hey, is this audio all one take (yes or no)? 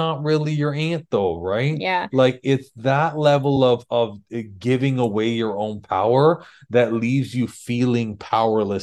yes